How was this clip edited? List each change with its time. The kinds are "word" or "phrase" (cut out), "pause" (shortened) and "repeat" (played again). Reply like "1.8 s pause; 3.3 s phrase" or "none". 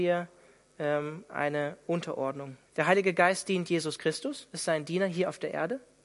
2.7 s pause